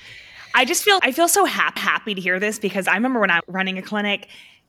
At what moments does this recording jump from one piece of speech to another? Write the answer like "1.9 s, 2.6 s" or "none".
1.0 s, 1.8 s, 3.4 s